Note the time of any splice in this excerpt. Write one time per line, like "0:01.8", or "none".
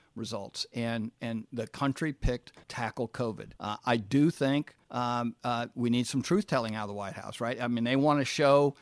0:02.6
0:03.6
0:04.8